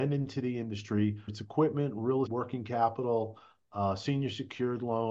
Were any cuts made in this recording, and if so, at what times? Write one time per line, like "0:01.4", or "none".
0:01.3
0:02.3